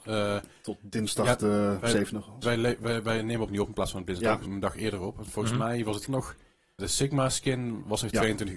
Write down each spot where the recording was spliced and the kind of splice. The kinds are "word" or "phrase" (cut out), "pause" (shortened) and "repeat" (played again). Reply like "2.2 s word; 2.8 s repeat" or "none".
2.4 s word; 3.5 s word; 4.5 s word; 6.1 s word; 6.8 s word

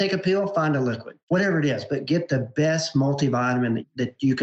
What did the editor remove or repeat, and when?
1.2 s pause

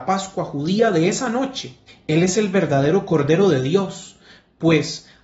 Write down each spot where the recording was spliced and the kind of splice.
1.9 s pause

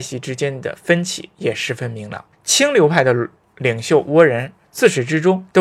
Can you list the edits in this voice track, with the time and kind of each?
2.3 s pause; 3.4 s pause

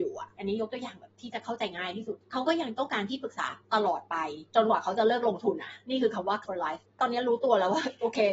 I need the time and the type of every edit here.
6.4 s word; 6.9 s pause

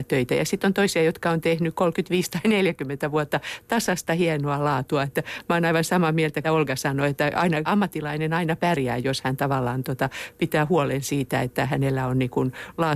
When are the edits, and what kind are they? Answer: 6.4 s word; 7.7 s word

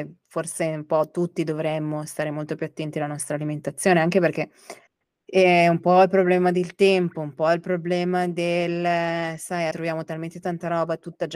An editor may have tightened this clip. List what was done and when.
4.9 s pause; 9.7 s word

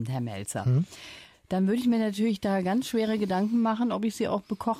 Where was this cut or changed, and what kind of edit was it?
none

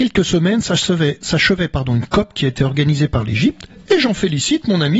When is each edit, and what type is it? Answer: none

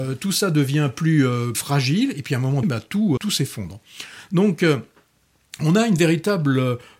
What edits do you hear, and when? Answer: 1.5 s word; 2.6 s word; 3.2 s word

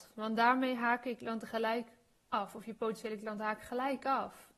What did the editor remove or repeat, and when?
none

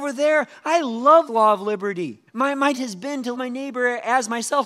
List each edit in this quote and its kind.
1.3 s word; 2.3 s pause; 2.8 s word; 3.3 s word

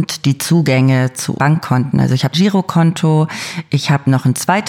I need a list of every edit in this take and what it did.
1.3 s word; 2.3 s phrase

